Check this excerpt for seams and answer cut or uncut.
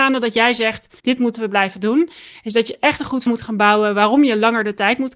cut